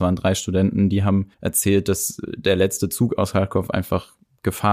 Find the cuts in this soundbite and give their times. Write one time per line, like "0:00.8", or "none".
0:01.3